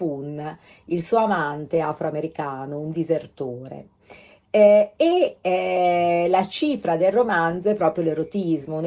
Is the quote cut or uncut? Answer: uncut